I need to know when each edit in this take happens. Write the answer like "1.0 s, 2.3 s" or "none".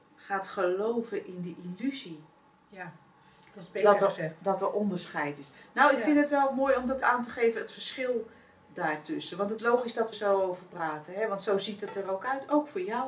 7.0 s, 9.6 s, 10.1 s

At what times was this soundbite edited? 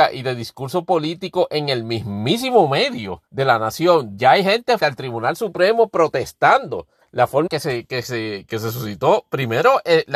3.3 s, 4.2 s, 4.8 s, 7.0 s, 7.5 s, 8.5 s

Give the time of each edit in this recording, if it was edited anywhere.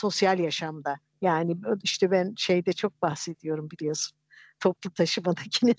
none

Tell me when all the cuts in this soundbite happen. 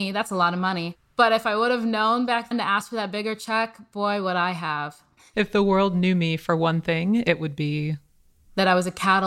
2.5 s, 5.2 s

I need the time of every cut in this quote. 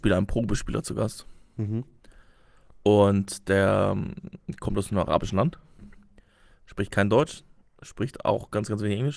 none

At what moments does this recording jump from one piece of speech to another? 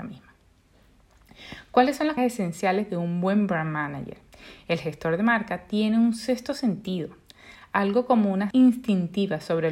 2.2 s, 8.5 s

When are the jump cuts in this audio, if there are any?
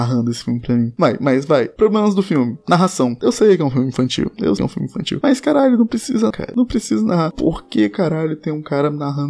4.6 s, 6.3 s

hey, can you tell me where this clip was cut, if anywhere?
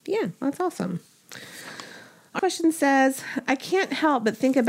2.4 s

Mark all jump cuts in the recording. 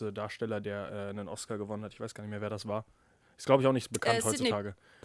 none

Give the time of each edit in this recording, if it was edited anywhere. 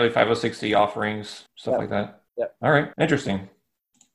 1.5 s, 2.3 s, 2.9 s

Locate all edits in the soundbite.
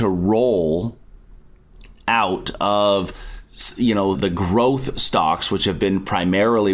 4.1 s

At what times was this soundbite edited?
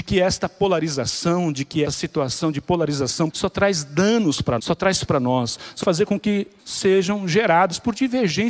1.8 s, 3.3 s, 4.6 s, 5.0 s, 5.8 s, 6.6 s

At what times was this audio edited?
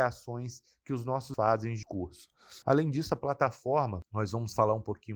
1.3 s, 1.8 s

